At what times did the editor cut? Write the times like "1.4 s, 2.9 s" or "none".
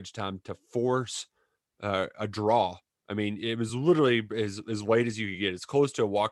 none